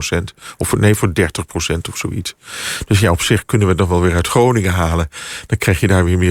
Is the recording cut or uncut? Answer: uncut